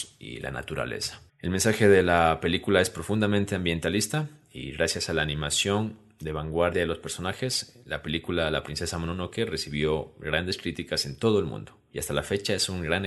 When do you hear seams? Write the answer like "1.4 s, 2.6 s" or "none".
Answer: 1.3 s